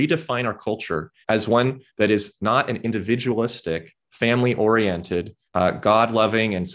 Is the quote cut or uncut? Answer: cut